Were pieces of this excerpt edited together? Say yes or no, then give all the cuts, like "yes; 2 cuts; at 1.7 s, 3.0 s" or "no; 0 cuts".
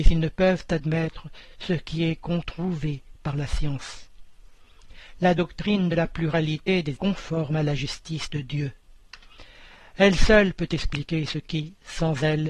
yes; 1 cut; at 7.0 s